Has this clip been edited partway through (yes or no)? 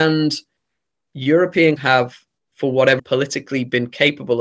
yes